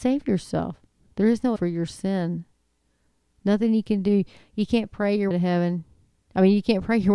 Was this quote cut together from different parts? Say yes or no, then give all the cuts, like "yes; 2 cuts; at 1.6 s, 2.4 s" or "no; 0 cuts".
yes; 2 cuts; at 1.6 s, 5.3 s